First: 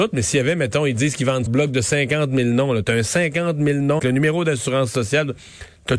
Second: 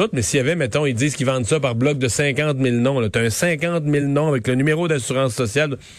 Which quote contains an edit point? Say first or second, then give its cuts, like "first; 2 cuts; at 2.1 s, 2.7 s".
first; 2 cuts; at 1.5 s, 4.0 s